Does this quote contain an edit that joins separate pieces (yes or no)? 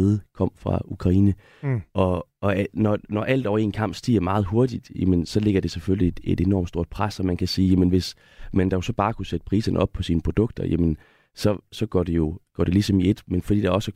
no